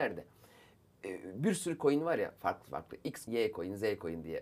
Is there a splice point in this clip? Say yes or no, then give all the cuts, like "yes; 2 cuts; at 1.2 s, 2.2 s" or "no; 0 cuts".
yes; 1 cut; at 3.3 s